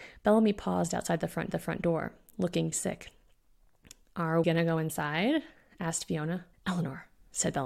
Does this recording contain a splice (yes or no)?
yes